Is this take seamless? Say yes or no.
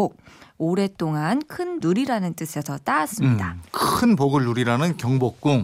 no